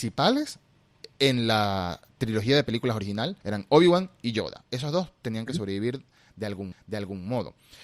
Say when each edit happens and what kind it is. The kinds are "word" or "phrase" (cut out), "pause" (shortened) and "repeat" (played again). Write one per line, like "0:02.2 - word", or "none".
0:03.4 - pause
0:06.7 - repeat